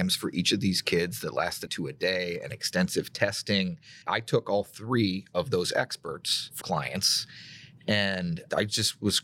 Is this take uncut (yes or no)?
no